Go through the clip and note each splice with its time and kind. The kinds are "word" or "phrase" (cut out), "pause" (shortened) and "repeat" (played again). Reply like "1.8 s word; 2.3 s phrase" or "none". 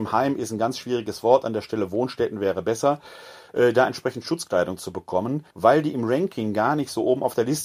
5.5 s pause